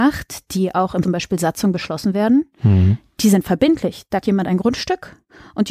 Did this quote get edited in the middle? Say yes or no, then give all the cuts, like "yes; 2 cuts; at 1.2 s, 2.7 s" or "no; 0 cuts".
yes; 2 cuts; at 1.0 s, 4.2 s